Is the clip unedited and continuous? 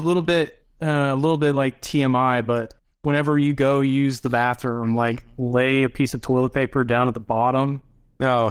no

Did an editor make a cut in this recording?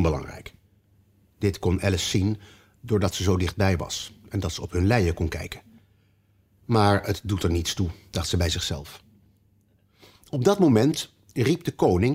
no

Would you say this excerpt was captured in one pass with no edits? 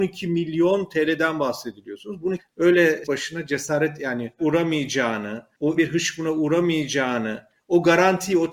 no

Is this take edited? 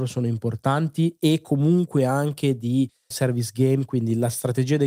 yes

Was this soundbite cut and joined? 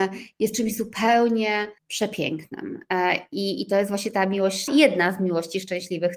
yes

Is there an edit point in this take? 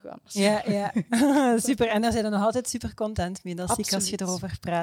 no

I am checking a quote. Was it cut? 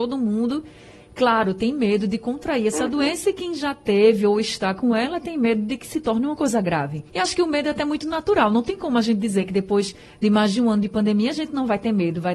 yes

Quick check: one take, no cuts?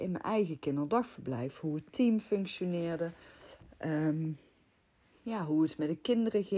yes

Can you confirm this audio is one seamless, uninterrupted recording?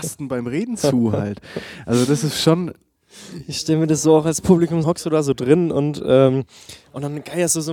no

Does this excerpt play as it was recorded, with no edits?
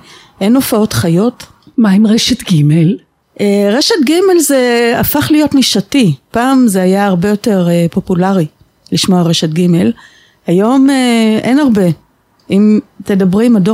yes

